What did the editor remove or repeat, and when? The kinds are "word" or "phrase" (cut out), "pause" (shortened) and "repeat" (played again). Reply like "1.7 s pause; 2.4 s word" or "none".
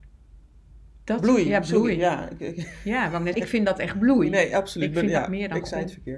3.3 s word